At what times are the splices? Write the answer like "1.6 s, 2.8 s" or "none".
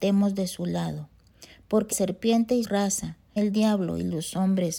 1.9 s, 2.6 s, 3.4 s